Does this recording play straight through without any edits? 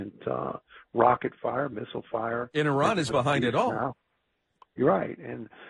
yes; 0 cuts

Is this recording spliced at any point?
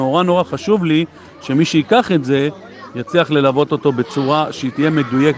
no; 0 cuts

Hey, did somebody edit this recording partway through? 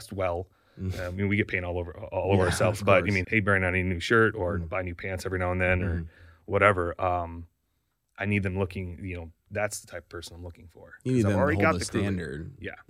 yes; 1 cut; at 3.2 s

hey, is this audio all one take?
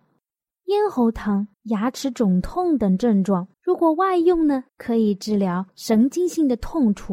no; 4 cuts; at 1.5 s, 3.5 s, 4.7 s, 5.7 s

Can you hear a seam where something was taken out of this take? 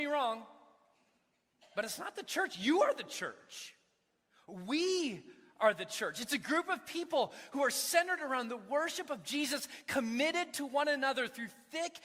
no; 0 cuts

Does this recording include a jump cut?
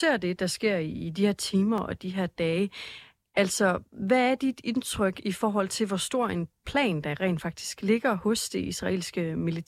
no; 0 cuts

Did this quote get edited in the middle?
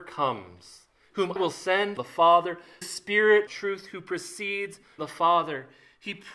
yes; 5 cuts; at 1.4 s, 2.0 s, 2.8 s, 3.5 s, 5.0 s

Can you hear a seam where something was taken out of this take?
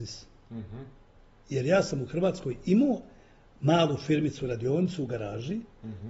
no; 0 cuts

